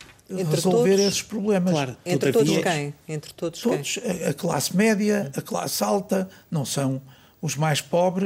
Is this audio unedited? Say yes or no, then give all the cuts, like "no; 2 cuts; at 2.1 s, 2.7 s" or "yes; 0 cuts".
yes; 0 cuts